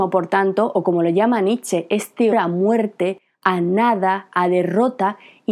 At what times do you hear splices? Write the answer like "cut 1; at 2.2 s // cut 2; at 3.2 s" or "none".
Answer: cut 1; at 2.3 s

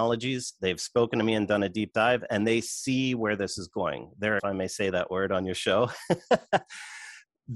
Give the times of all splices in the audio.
cut 1; at 4.4 s

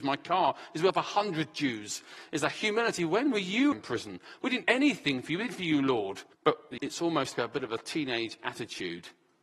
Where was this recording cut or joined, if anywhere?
cut 1; at 3.7 s // cut 2; at 4.6 s // cut 3; at 5.5 s // cut 4; at 6.3 s // cut 5; at 6.8 s // cut 6; at 7.3 s

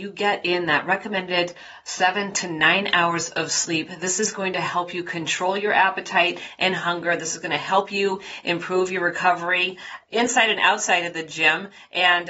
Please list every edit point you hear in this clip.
none

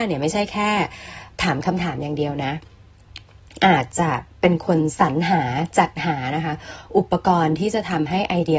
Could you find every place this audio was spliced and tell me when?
none

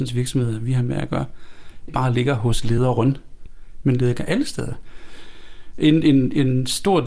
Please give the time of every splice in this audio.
cut 1; at 1.9 s

